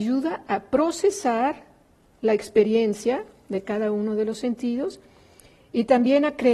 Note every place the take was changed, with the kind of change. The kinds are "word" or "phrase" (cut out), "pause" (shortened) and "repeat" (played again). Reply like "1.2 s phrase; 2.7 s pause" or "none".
none

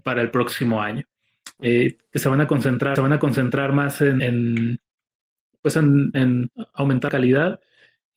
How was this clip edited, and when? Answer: 3.0 s repeat; 4.2 s word; 6.1 s phrase; 7.1 s word

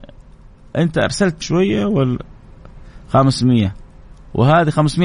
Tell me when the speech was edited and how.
1.4 s word

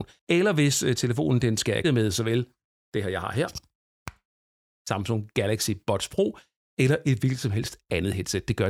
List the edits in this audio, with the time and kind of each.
1.8 s word

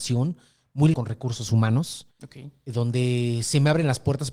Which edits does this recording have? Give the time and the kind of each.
0.9 s word; 2.1 s pause

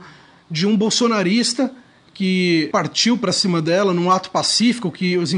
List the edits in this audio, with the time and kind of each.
none

